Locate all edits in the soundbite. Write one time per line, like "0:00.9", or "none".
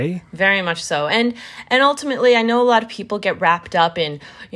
none

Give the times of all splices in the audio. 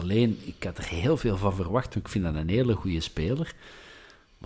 none

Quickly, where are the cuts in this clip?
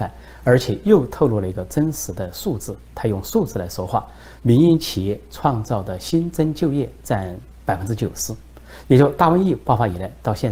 0:04.4

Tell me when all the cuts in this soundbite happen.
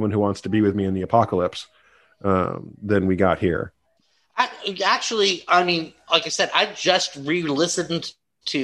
none

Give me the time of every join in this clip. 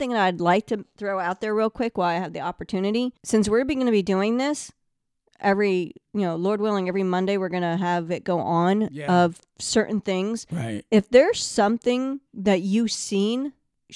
0:12.3

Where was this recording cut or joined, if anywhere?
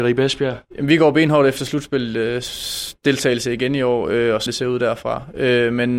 0:04.5

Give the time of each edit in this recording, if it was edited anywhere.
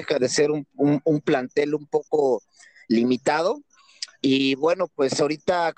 0:04.1

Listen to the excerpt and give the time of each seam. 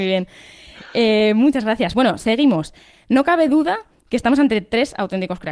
none

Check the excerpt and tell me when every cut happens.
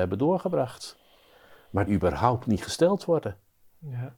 0:01.9

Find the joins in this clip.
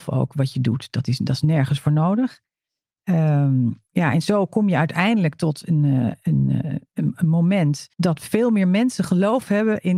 0:07.9

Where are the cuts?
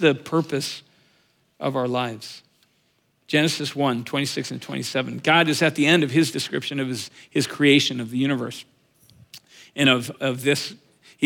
none

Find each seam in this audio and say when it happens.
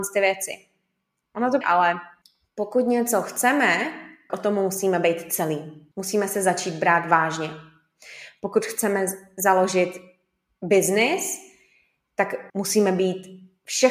0:01.6
0:02.2
0:04.3
0:05.9
0:12.5

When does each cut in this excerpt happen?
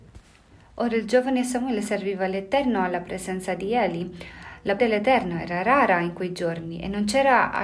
0:04.8

